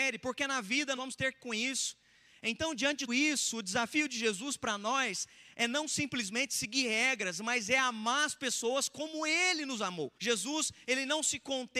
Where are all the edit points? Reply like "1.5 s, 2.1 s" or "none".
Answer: 1.0 s, 1.4 s, 3.1 s, 10.2 s

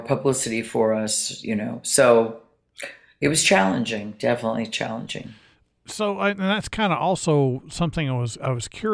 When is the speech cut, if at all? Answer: none

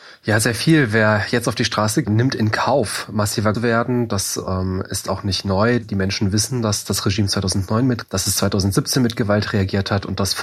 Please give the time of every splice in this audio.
2.0 s, 3.5 s, 8.0 s

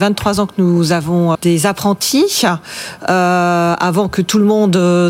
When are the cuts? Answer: 1.3 s

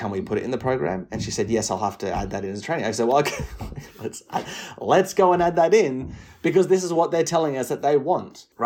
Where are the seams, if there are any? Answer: none

